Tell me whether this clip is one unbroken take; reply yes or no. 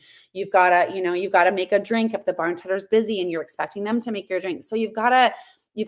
yes